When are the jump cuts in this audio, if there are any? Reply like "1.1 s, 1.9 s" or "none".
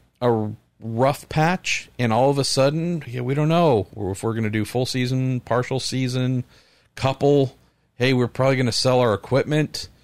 3.0 s